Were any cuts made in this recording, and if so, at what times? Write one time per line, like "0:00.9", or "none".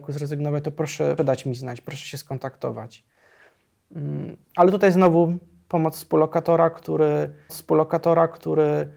0:01.2
0:04.4
0:07.5

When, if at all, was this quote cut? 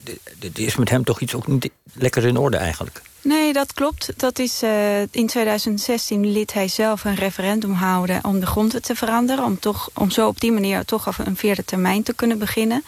0:03.1
0:09.9

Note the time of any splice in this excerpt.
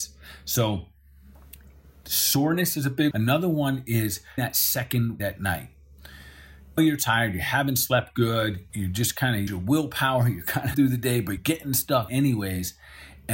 0:03.1
0:04.4
0:05.2
0:06.8
0:08.7
0:09.5
0:10.7
0:11.4
0:12.1

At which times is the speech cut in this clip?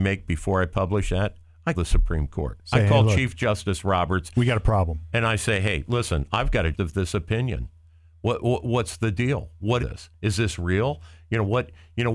0:01.7
0:06.7
0:09.8

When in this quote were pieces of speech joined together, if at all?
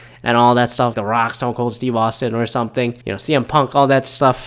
0:00.9
0:03.0

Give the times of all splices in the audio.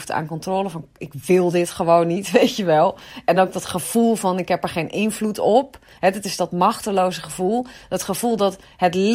none

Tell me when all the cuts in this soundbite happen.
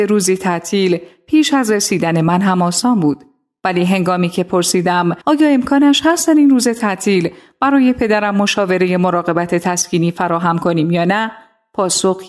0:05.2

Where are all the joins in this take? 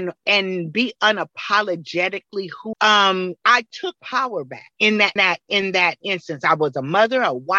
0:02.7
0:03.4
0:04.0
0:04.7
0:05.2
0:06.0

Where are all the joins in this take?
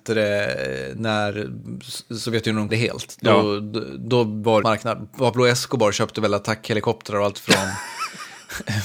0:02.7
0:04.6
0:07.3

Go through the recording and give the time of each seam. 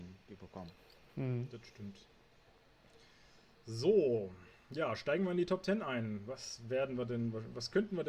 none

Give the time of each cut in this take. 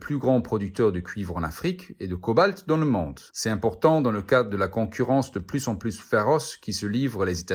0:03.3

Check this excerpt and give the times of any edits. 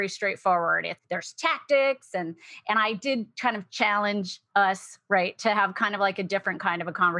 0:01.0

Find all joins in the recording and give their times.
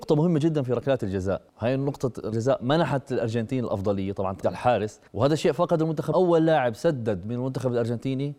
0:01.5
0:02.3
0:04.4
0:05.1
0:06.1

